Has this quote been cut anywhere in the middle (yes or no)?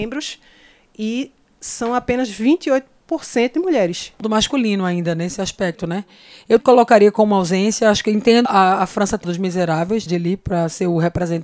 yes